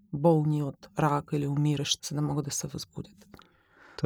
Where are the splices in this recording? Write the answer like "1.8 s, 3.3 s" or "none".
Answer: 2.0 s